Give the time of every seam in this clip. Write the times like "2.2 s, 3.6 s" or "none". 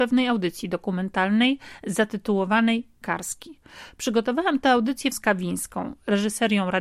3.0 s, 5.1 s